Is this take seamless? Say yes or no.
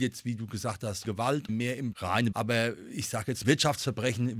no